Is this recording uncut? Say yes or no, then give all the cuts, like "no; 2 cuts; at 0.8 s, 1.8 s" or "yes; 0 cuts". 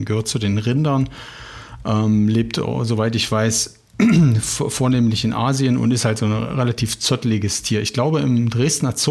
yes; 0 cuts